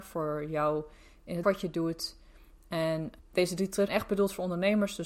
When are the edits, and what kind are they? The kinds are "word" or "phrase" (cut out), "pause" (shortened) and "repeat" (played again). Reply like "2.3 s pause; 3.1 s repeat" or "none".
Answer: 1.4 s word; 3.2 s word; 3.9 s word